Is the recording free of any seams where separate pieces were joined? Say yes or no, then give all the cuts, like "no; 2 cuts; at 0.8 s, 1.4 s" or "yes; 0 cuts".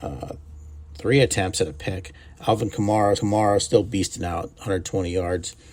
no; 1 cut; at 3.2 s